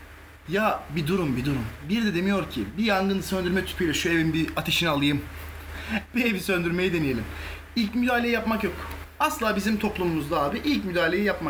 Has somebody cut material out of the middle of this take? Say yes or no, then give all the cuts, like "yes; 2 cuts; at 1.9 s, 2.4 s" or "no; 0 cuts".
no; 0 cuts